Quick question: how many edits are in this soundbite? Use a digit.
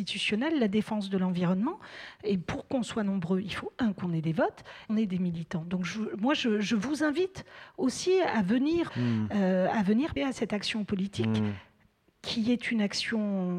3